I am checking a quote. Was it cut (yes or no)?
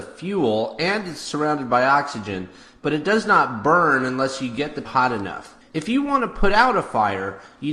yes